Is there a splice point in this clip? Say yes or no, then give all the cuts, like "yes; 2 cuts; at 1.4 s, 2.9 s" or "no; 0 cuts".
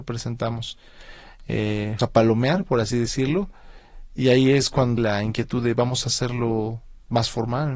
yes; 2 cuts; at 2.0 s, 5.0 s